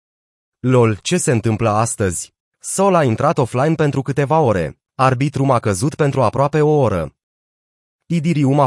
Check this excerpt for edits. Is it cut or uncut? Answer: cut